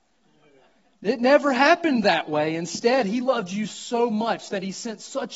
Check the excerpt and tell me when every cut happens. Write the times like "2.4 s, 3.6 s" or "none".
none

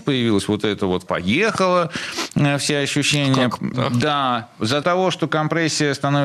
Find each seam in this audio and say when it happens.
1.1 s, 3.7 s, 4.8 s

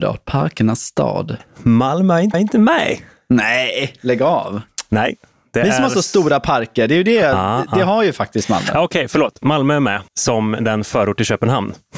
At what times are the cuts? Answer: 2.3 s, 7.7 s, 10.1 s

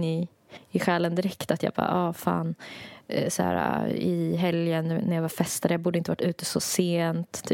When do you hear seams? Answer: none

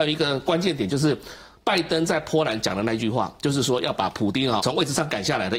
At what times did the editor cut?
4.6 s

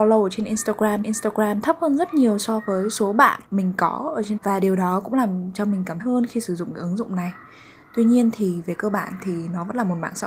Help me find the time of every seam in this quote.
1.0 s, 3.5 s, 4.4 s, 6.0 s

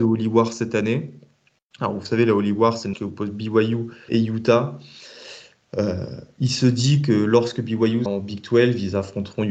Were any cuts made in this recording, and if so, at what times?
2.9 s, 4.1 s, 8.1 s

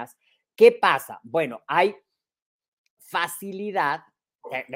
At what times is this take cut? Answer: 3.0 s

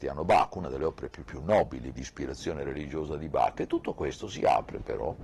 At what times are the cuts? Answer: 1.2 s, 1.9 s

